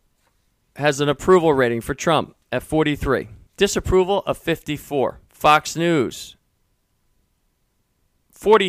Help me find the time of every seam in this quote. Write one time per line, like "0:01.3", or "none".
0:02.4
0:03.5
0:05.3